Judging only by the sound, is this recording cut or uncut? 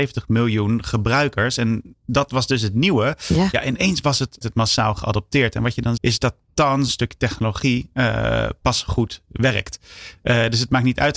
cut